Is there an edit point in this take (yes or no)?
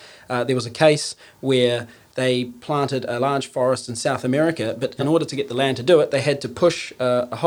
no